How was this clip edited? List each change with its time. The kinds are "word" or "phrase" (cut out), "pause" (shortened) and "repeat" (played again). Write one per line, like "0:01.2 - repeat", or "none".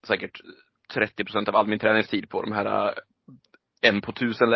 none